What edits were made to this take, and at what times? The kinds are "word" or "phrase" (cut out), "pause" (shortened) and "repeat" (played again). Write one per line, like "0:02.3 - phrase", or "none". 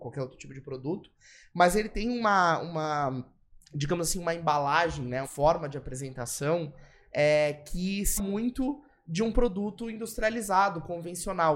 0:05.2 - word
0:08.2 - word